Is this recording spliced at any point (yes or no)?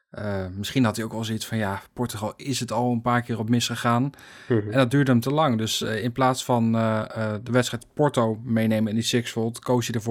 no